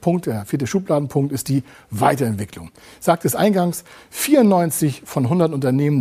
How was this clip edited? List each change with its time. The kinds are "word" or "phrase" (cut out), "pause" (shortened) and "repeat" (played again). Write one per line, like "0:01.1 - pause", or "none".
none